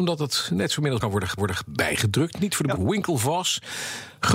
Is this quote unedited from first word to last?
no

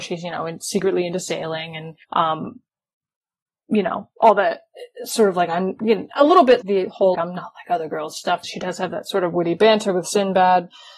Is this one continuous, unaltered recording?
no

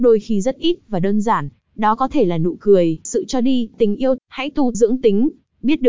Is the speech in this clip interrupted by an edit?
yes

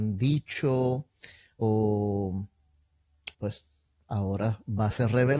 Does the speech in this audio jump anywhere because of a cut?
yes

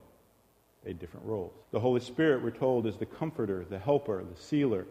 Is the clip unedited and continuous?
no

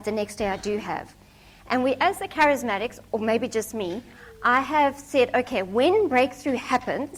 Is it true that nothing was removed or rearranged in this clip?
yes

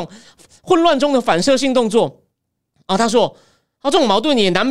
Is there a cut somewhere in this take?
no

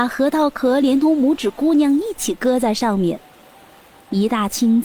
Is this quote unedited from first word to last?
yes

